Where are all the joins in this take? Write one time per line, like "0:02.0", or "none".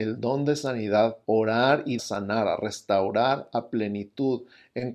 0:01.2
0:02.0